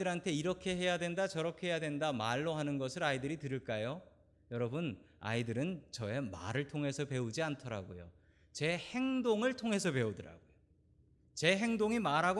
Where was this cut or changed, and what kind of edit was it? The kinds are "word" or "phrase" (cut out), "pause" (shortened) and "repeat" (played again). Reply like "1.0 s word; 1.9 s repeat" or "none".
none

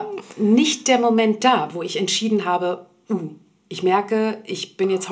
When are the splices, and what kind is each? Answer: none

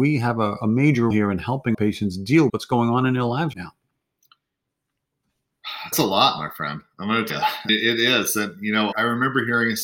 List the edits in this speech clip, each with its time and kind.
1.1 s word; 1.7 s word; 2.5 s word; 3.5 s word; 5.9 s word; 7.3 s word; 7.7 s word; 8.9 s word

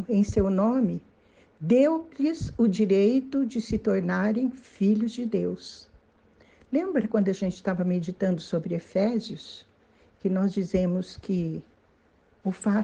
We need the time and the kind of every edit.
none

